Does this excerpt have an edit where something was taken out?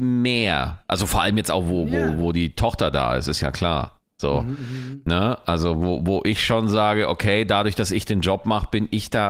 no; 0 cuts

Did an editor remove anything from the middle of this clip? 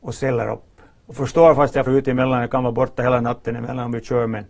yes; 2 cuts; at 1.0 s, 1.9 s

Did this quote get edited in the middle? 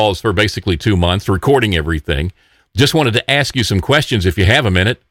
no; 0 cuts

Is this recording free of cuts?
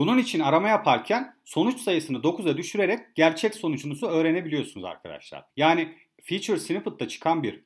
no; 1 cut; at 5.5 s

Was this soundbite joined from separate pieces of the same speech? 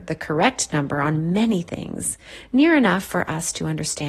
no; 0 cuts

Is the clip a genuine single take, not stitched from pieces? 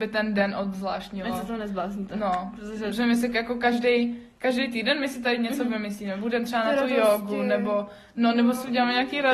yes; 0 cuts

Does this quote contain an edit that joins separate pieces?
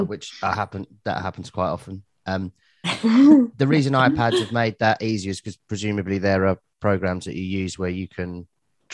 no; 0 cuts

